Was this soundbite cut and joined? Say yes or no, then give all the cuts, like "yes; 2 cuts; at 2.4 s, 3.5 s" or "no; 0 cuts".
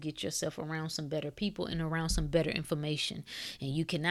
no; 0 cuts